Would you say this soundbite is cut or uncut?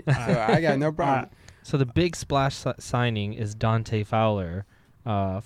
uncut